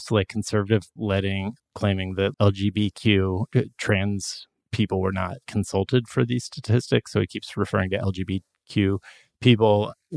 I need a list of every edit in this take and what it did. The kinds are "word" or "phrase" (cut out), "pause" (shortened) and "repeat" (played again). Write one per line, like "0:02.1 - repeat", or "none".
0:01.0 - word
0:01.6 - word
0:02.3 - word
0:05.4 - word

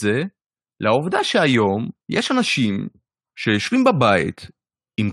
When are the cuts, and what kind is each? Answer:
0:02.0 - pause
0:03.1 - pause

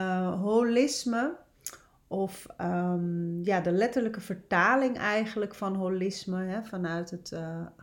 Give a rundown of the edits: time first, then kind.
none

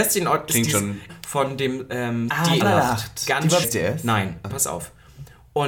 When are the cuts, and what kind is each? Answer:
0:01.1 - phrase
0:02.3 - word
0:02.6 - word
0:03.6 - word
0:04.5 - word

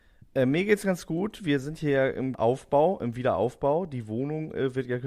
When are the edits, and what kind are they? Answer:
0:02.3 - word

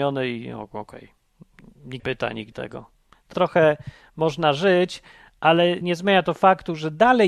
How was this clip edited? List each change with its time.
0:02.0 - word
0:02.5 - word
0:03.3 - word
0:05.8 - word

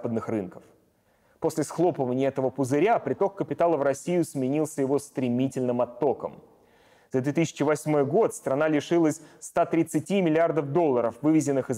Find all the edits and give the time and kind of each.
none

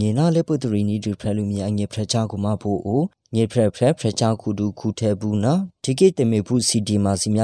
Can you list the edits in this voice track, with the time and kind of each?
0:05.8 - pause

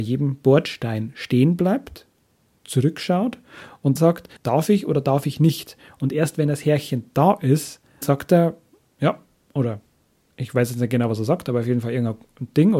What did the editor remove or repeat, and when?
0:04.0 - word
0:04.4 - pause
0:08.0 - word

